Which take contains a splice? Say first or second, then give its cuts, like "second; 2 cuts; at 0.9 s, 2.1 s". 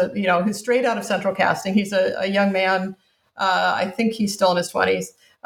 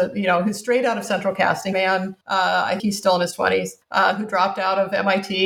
second; 4 cuts; at 1.7 s, 2.2 s, 2.8 s, 3.8 s